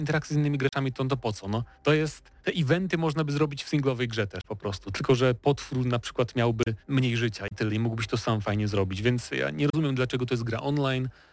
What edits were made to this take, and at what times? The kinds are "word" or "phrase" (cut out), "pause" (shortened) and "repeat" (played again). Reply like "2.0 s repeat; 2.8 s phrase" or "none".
1.7 s pause; 2.4 s pause; 6.8 s pause